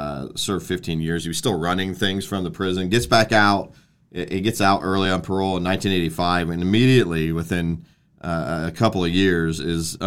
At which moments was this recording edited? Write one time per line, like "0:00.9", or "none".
none